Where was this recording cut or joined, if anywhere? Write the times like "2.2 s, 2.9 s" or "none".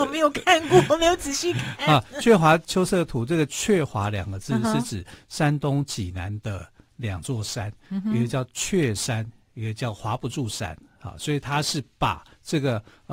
none